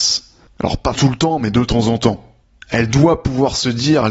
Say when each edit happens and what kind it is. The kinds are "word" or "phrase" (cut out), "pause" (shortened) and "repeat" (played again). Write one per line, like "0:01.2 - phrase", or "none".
0:01.0 - word